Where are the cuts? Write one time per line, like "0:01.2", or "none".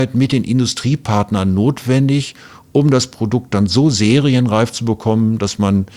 none